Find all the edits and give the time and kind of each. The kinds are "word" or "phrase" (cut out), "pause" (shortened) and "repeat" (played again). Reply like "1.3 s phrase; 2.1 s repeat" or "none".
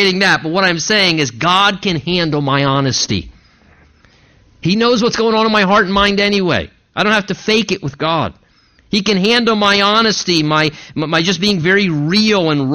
none